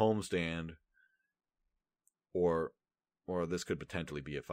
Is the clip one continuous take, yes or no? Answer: yes